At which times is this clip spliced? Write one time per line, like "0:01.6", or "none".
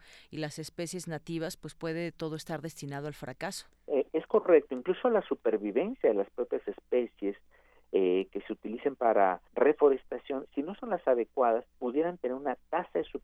0:03.7
0:09.5
0:11.7